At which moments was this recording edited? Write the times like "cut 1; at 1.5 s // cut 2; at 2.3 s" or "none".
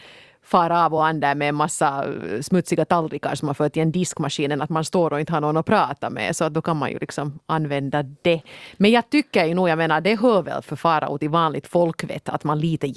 none